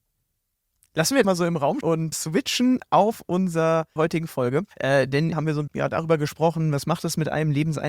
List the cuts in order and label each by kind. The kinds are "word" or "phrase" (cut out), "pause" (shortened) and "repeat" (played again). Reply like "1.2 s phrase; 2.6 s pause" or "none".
1.2 s word; 1.8 s word; 2.1 s word; 4.0 s phrase; 4.7 s pause; 5.3 s phrase; 5.7 s word